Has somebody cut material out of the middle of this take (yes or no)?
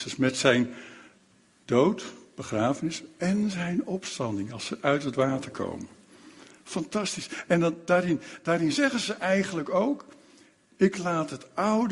no